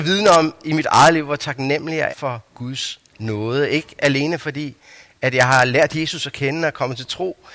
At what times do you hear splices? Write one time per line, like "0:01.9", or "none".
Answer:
0:02.1
0:02.5